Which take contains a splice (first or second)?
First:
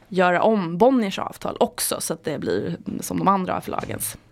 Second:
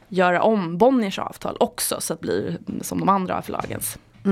second